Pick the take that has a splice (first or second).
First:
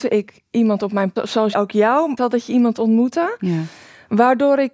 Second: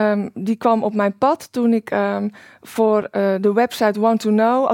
first